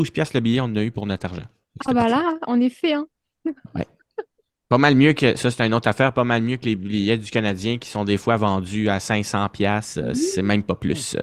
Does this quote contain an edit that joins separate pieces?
no; 0 cuts

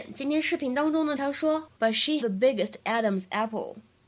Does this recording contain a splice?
yes; 3 cuts; at 1.2 s, 1.8 s, 2.2 s

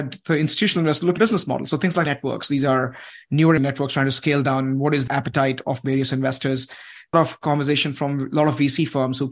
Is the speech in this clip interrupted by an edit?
yes; 5 cuts; at 1.2 s, 2.1 s, 3.6 s, 5.1 s, 7.1 s

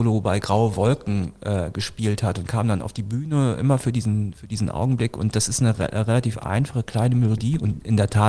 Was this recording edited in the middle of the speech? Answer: no; 0 cuts

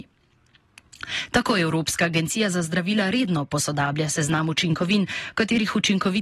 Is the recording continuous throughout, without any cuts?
yes; 0 cuts

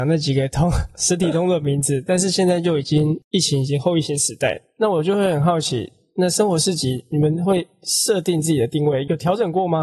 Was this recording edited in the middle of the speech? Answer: no; 0 cuts

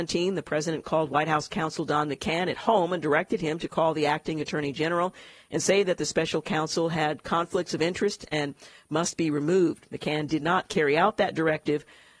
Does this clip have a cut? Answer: no; 0 cuts

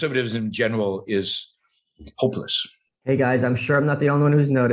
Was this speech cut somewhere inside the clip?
no; 0 cuts

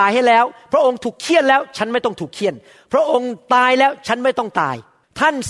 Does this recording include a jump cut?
no; 0 cuts

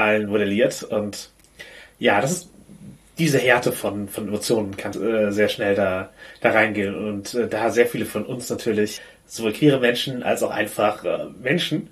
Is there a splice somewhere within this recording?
yes; 1 cut; at 4.9 s

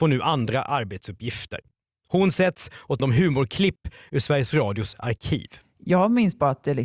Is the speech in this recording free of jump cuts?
no; 1 cut; at 3.0 s

